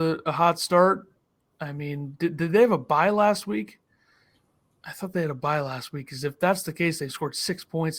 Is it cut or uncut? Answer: uncut